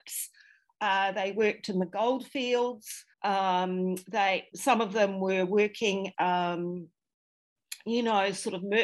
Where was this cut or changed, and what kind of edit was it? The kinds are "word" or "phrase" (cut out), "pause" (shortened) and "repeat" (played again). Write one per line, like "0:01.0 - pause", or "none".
0:03.1 - pause
0:04.5 - word
0:06.1 - word